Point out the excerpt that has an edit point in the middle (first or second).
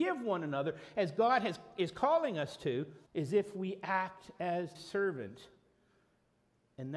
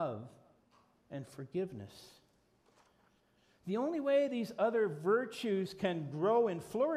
first